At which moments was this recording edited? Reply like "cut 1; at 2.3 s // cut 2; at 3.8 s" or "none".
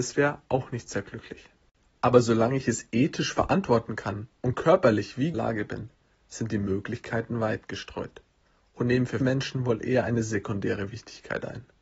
cut 1; at 4.4 s // cut 2; at 5.3 s // cut 3; at 9.2 s

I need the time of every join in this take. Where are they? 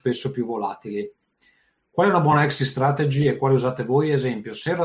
none

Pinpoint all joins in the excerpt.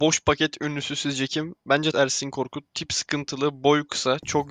cut 1; at 1.9 s

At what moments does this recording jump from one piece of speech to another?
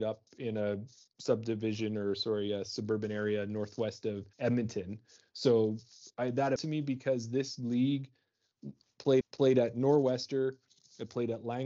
cut 1; at 4.3 s // cut 2; at 6.6 s // cut 3; at 9.2 s

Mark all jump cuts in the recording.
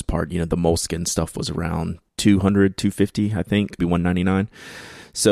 cut 1; at 2.1 s // cut 2; at 3.8 s

